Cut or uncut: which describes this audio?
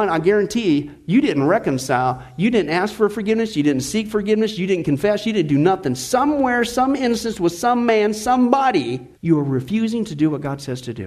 cut